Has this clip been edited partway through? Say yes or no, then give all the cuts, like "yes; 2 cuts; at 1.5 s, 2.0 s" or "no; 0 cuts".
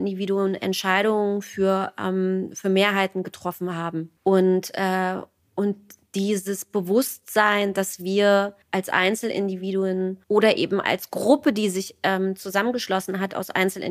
yes; 4 cuts; at 4.2 s, 5.4 s, 8.6 s, 10.2 s